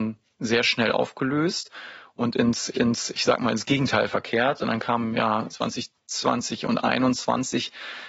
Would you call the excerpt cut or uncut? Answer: cut